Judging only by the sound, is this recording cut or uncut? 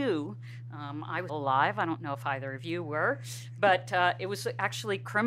cut